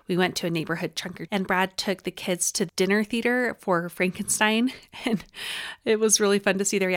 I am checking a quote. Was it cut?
yes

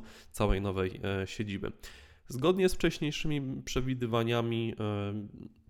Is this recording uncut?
yes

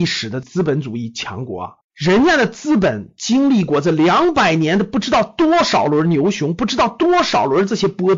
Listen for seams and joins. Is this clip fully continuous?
no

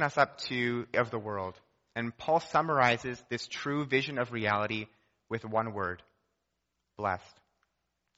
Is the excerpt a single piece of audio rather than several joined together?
no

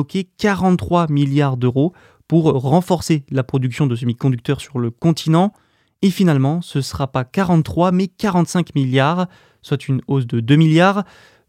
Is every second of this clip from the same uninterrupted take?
yes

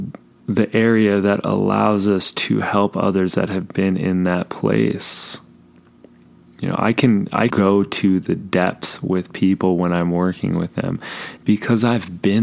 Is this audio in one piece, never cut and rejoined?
no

